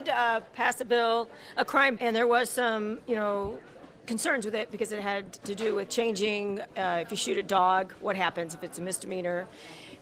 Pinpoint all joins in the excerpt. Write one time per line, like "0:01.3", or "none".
0:02.0